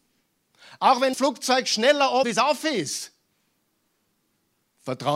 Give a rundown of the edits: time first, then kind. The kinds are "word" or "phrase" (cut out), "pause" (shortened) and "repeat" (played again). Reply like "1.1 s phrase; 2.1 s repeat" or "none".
1.1 s word; 2.2 s word